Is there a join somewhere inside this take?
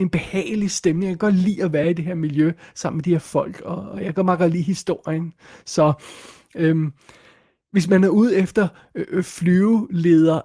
no; 0 cuts

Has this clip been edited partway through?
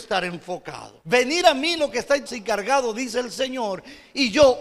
yes; 2 cuts; at 1.0 s, 2.3 s

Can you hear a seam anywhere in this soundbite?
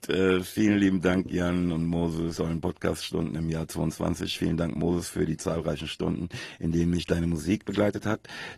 yes; 1 cut; at 2.3 s

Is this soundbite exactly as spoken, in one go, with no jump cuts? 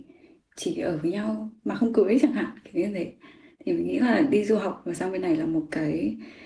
yes; 0 cuts

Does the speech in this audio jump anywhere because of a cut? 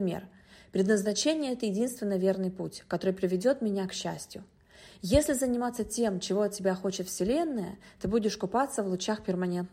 no; 0 cuts

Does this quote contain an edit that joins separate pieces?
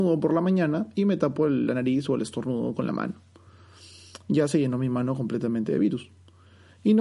no; 0 cuts

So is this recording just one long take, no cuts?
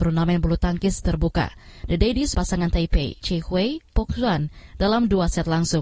no; 4 cuts; at 1.0 s, 2.3 s, 3.2 s, 3.9 s

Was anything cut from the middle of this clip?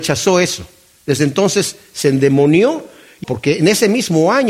yes; 1 cut; at 3.2 s

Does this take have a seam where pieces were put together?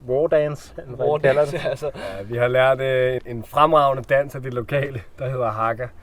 yes; 1 cut; at 3.2 s

